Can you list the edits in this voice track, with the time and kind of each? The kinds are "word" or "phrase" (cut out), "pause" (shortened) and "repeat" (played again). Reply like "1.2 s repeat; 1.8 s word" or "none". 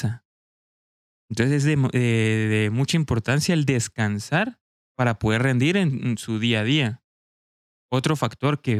none